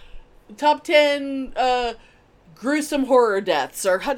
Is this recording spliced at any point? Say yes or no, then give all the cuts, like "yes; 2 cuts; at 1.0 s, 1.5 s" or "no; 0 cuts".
no; 0 cuts